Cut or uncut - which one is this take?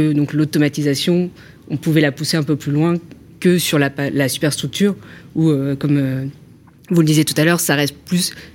uncut